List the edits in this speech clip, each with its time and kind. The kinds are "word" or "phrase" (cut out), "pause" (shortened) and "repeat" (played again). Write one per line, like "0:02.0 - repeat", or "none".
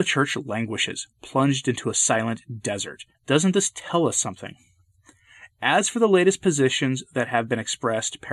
0:03.1 - pause